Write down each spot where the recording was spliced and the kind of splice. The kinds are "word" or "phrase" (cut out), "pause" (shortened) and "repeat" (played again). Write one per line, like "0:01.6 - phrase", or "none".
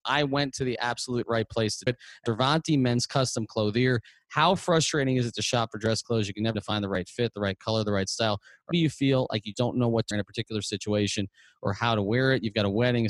0:01.9 - word
0:02.3 - word
0:06.5 - word
0:08.7 - word
0:09.5 - word
0:10.1 - word